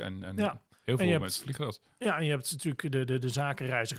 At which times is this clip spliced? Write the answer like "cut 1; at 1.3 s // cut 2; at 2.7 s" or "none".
none